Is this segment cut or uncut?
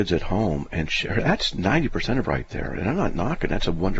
cut